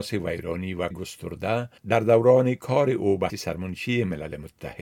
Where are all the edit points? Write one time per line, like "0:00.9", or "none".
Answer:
0:00.9
0:01.8
0:03.3